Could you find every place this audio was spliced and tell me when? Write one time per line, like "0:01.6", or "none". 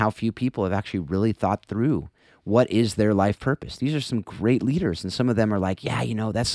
none